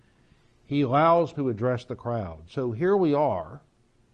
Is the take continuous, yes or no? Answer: no